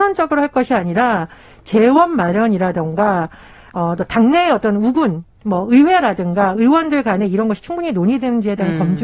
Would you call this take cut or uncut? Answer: uncut